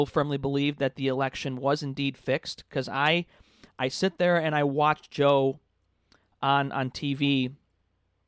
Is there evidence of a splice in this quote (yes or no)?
no